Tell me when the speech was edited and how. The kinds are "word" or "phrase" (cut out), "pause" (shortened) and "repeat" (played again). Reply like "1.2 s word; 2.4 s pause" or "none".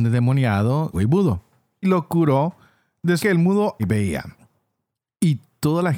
0.9 s word; 1.8 s word; 3.2 s word; 3.8 s word

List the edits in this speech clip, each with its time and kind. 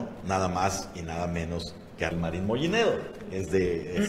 2.1 s word

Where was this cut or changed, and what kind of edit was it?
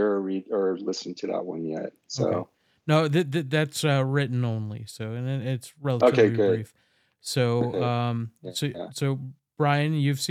none

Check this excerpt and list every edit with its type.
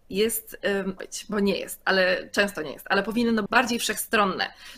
1.0 s word; 3.5 s word

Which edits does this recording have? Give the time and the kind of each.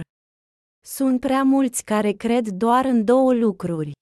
1.2 s word

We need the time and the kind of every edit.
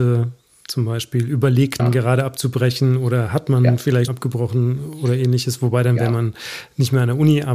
1.8 s word; 4.1 s word

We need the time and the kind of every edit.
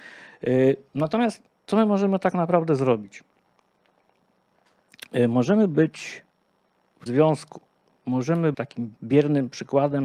1.5 s pause; 7.1 s word; 8.5 s word; 9.0 s pause

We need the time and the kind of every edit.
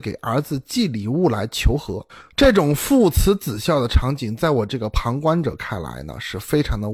none

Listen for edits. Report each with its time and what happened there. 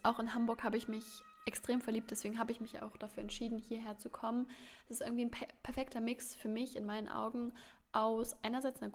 none

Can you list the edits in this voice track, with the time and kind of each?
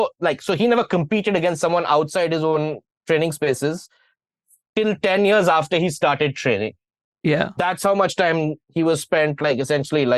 4.6 s word; 7.6 s word

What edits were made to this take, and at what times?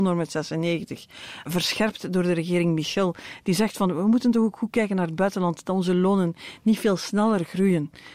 none

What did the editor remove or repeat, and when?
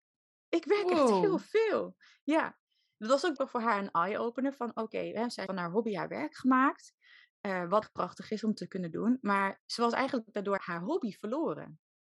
3.4 s word; 5.5 s word; 7.8 s word; 10.6 s word

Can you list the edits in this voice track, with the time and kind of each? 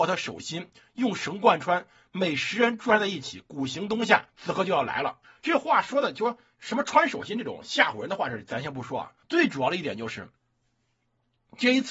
4.3 s pause; 5.2 s pause; 9.2 s pause

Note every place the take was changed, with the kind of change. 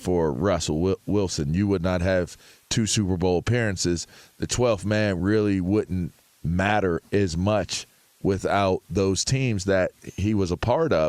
none

